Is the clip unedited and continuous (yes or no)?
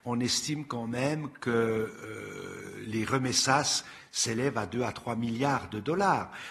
yes